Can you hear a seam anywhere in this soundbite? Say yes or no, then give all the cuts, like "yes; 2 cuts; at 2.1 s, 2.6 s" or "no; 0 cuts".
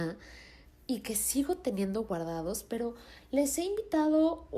no; 0 cuts